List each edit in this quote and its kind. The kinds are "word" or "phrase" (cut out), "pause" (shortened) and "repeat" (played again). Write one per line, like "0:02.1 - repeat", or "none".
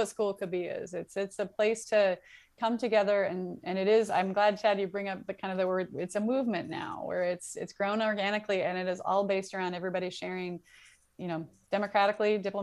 none